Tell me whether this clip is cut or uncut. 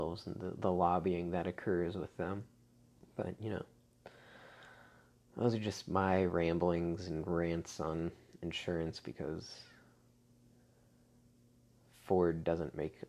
cut